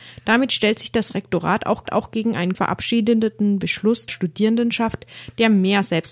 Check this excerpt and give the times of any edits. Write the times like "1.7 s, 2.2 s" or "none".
1.8 s, 2.5 s, 4.1 s